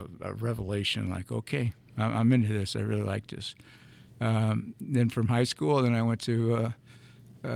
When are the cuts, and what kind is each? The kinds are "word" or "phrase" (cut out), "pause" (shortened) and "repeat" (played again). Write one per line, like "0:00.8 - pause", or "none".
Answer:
none